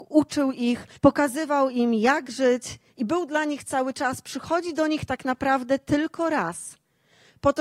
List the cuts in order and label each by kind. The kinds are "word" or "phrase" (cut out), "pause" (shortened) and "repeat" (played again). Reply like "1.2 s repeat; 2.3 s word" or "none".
1.0 s pause; 2.9 s pause